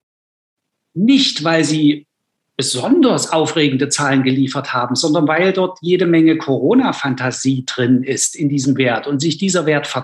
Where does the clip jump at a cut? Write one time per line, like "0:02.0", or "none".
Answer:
none